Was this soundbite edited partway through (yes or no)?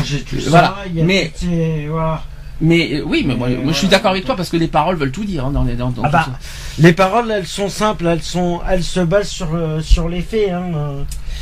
no